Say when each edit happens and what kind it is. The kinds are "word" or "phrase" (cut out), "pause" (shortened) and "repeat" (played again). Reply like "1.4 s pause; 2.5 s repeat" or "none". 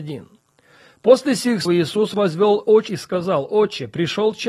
1.7 s word; 2.9 s phrase